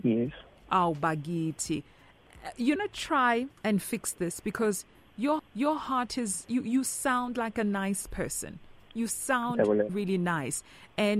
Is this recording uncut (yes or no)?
no